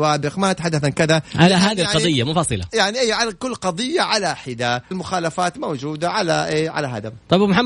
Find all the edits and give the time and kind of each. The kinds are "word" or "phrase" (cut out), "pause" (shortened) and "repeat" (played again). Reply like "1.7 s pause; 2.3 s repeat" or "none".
4.9 s word